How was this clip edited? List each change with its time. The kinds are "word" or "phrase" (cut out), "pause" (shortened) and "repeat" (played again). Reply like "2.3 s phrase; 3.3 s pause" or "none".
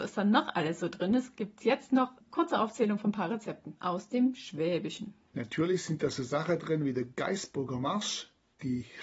2.2 s pause; 3.8 s pause